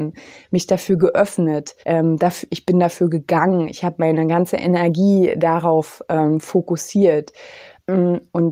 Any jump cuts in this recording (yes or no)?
yes